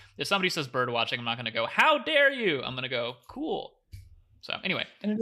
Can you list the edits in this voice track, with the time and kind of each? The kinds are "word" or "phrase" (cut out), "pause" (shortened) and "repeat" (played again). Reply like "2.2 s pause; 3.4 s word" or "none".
none